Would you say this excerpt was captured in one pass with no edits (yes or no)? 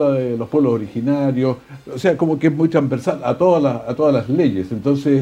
yes